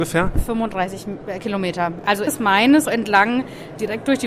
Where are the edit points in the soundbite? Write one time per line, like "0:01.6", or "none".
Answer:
0:02.3
0:02.9